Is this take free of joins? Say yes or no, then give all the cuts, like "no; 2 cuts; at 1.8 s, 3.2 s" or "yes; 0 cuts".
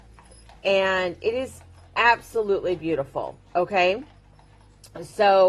yes; 0 cuts